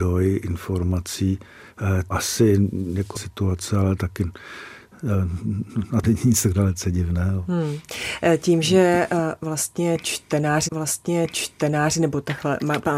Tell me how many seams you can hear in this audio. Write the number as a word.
four